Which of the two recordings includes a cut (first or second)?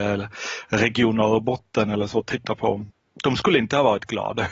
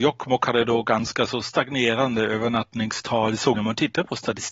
second